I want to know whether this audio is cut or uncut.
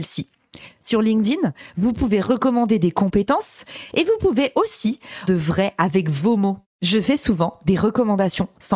cut